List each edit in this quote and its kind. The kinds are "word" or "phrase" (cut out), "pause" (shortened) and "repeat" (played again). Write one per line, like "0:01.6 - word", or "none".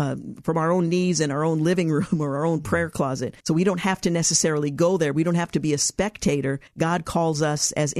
0:03.4 - pause
0:06.7 - pause